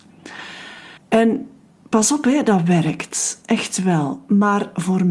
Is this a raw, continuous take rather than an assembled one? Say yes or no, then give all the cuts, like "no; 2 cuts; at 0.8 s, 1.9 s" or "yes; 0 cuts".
no; 1 cut; at 1.0 s